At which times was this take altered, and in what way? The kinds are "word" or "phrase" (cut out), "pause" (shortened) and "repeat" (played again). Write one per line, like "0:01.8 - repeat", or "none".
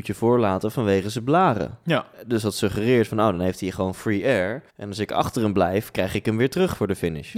0:04.7 - pause